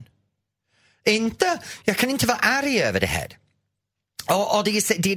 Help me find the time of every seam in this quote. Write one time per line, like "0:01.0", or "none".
none